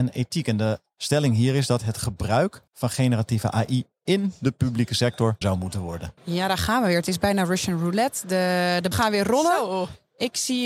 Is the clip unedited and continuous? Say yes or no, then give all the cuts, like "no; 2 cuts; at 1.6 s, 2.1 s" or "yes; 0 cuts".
no; 4 cuts; at 2.7 s, 5.4 s, 6.2 s, 8.9 s